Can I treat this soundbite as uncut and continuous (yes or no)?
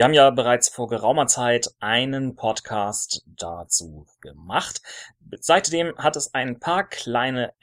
yes